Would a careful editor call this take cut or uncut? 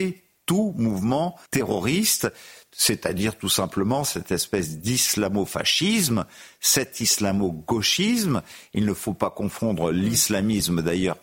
cut